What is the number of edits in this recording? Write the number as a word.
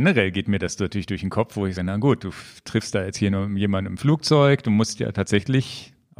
one